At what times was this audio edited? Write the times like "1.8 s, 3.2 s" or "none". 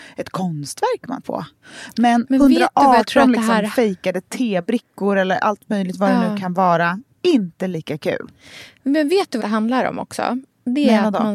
1.2 s, 9.4 s